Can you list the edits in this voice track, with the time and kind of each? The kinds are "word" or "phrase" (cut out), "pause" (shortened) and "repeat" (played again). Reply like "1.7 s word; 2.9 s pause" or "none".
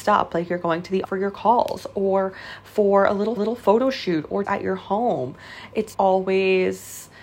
1.0 s word; 3.4 s repeat; 4.4 s phrase; 5.9 s word